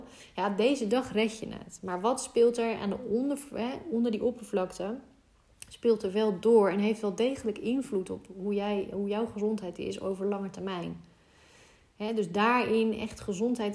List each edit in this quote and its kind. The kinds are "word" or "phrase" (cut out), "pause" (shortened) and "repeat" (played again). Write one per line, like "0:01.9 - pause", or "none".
none